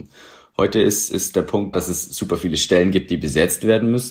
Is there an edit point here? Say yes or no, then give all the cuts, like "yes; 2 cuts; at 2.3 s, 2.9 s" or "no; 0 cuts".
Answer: yes; 1 cut; at 1.7 s